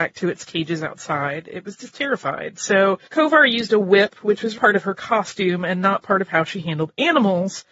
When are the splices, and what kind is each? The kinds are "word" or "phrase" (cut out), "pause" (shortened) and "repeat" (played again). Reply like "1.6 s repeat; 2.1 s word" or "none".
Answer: 3.0 s pause; 4.5 s word